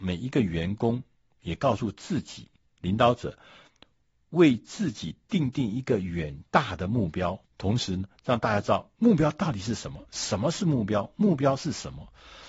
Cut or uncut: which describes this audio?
cut